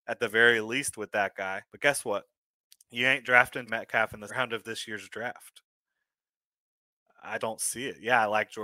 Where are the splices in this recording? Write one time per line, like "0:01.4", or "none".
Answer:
0:01.7
0:02.6
0:03.7
0:04.3
0:07.4